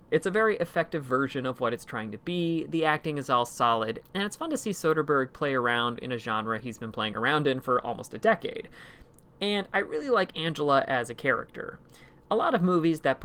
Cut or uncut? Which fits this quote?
uncut